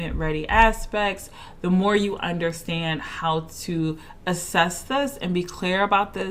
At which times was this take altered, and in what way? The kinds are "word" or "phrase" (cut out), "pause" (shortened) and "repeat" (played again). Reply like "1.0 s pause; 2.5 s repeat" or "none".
none